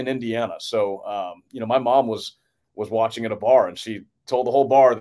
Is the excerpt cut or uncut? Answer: uncut